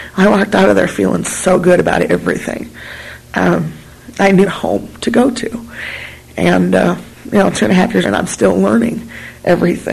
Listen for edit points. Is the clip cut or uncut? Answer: cut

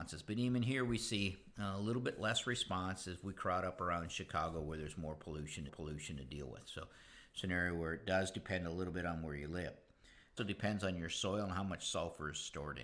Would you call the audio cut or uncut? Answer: cut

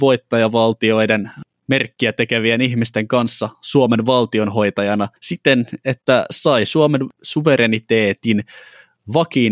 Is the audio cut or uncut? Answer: cut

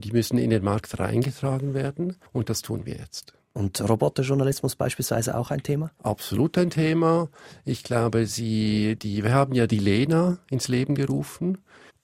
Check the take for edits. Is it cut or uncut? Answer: cut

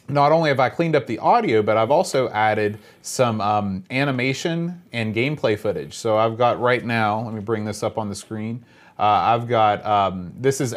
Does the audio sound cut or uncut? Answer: uncut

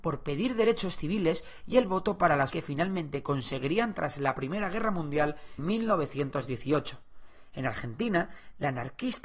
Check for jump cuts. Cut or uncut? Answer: cut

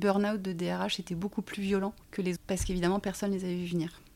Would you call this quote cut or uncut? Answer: cut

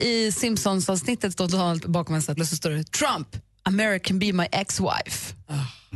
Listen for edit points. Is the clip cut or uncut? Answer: cut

